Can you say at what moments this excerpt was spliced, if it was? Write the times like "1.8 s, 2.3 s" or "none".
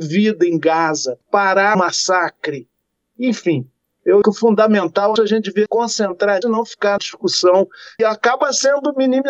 1.7 s, 4.2 s, 5.2 s, 5.7 s, 6.4 s, 7.0 s, 8.0 s

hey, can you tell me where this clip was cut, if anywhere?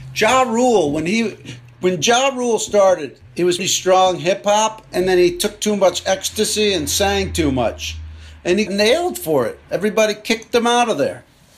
3.6 s, 8.7 s

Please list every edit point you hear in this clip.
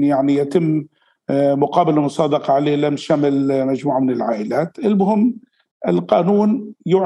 none

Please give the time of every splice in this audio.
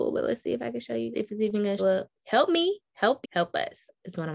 1.1 s, 1.8 s, 2.2 s, 3.2 s

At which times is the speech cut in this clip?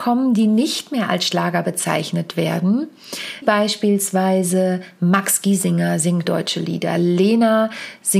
3.4 s, 6.2 s

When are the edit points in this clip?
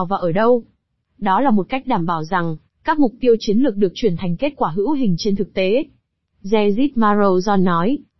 none

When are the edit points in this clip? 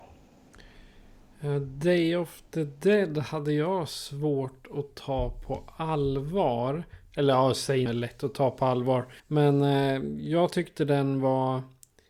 7.9 s, 9.2 s

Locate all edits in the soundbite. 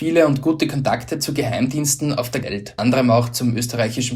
2.4 s, 2.8 s

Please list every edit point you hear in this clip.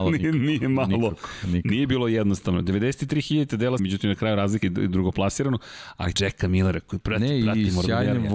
3.8 s, 4.6 s, 6.1 s, 7.0 s

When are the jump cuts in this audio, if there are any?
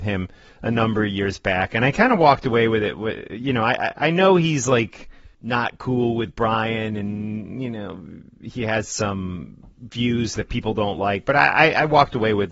5.3 s

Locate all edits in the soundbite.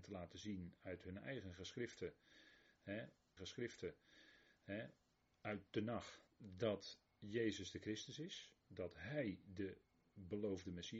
3.4 s, 6.3 s

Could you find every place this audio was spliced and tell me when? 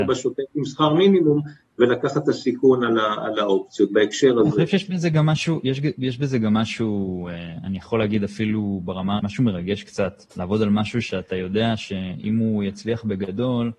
9.2 s, 10.3 s

